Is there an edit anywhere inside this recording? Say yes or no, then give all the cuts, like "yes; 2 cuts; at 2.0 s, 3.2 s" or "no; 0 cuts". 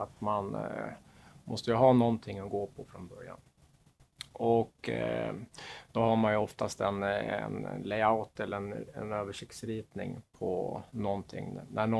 no; 0 cuts